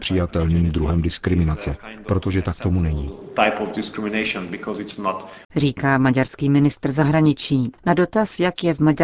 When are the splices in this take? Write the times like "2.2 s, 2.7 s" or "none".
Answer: 5.4 s, 7.8 s